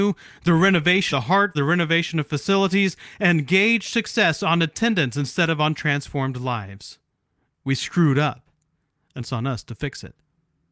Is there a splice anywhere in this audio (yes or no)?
yes